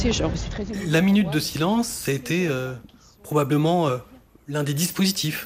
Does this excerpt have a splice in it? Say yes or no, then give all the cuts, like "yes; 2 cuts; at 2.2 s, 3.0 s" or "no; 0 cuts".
no; 0 cuts